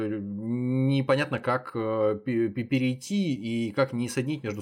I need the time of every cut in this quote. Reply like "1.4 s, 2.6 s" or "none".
none